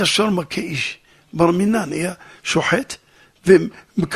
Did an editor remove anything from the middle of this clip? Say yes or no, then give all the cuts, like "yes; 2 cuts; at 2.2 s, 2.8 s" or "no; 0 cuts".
no; 0 cuts